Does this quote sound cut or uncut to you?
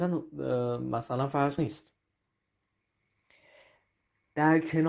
cut